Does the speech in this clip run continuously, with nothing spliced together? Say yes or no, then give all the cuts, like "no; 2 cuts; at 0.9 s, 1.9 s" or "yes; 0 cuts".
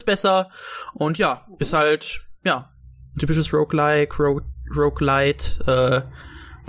no; 1 cut; at 2.4 s